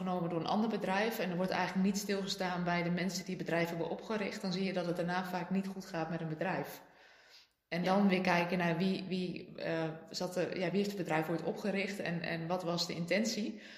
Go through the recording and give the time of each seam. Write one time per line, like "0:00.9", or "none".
none